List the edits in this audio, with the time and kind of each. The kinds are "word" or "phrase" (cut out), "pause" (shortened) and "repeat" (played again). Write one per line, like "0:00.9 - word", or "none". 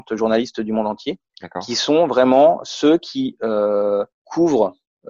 0:01.3 - pause
0:04.1 - pause